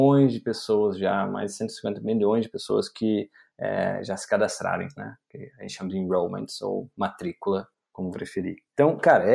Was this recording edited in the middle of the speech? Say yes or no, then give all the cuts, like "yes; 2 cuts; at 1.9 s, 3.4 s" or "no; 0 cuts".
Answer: yes; 2 cuts; at 4.9 s, 8.1 s